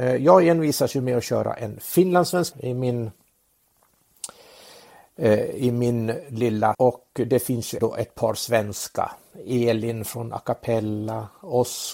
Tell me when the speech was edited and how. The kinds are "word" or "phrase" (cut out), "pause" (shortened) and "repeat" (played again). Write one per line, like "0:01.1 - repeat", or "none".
0:02.5 - word
0:06.7 - word
0:07.8 - word